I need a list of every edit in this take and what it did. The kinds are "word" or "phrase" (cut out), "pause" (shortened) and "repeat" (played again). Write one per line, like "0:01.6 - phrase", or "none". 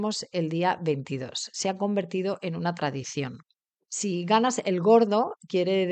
none